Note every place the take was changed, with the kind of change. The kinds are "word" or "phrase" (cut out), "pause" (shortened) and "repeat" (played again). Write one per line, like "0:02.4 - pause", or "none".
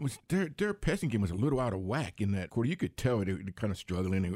0:02.5 - word